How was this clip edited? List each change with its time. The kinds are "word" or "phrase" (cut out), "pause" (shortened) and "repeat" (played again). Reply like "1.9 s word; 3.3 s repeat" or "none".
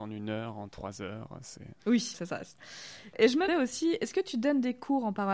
2.1 s word; 3.5 s word